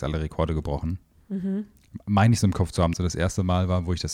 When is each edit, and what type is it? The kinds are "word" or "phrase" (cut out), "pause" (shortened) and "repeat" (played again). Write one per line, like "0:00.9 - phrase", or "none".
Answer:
0:02.9 - phrase